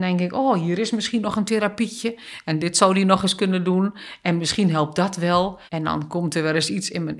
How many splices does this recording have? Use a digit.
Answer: 1